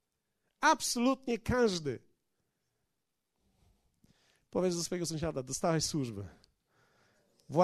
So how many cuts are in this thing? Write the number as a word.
zero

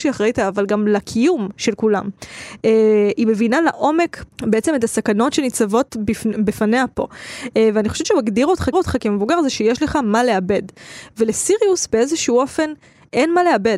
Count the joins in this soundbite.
three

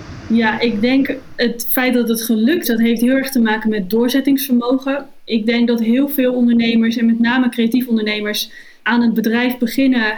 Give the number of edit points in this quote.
one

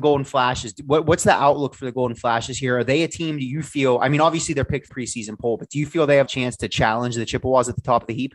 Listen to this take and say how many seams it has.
two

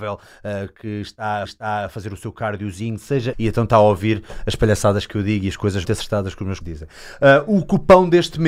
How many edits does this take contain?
four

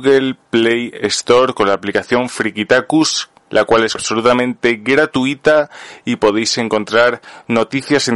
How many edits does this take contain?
two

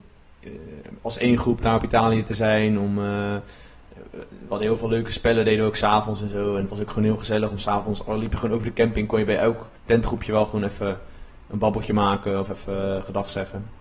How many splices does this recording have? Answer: one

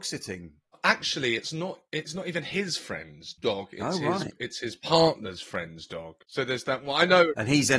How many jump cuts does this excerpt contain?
two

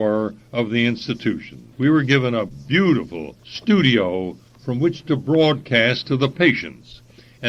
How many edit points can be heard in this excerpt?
two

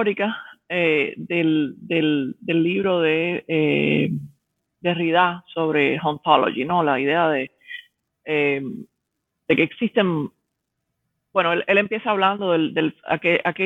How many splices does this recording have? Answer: zero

